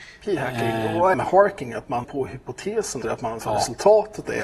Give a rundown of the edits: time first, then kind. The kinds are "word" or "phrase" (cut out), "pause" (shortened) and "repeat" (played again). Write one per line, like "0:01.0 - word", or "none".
0:01.1 - phrase
0:02.0 - word
0:03.0 - word
0:03.4 - word